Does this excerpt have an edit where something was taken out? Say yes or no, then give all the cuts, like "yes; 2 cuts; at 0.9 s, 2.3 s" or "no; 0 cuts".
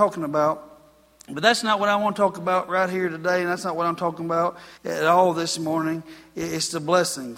yes; 1 cut; at 4.8 s